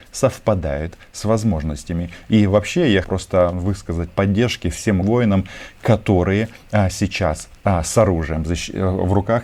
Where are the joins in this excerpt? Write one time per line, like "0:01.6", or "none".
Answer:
0:03.0
0:04.1
0:05.0